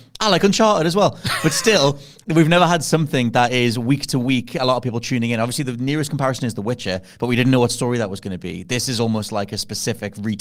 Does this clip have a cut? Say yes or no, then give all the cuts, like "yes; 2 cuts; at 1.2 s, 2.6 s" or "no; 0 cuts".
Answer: no; 0 cuts